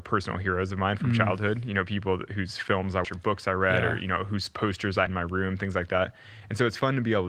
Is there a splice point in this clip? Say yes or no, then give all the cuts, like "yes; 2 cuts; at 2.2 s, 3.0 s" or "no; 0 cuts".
yes; 2 cuts; at 3.0 s, 5.1 s